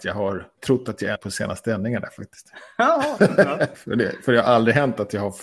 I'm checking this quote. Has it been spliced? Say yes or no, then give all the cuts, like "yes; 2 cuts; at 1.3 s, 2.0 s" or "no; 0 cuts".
yes; 3 cuts; at 1.2 s, 3.2 s, 3.7 s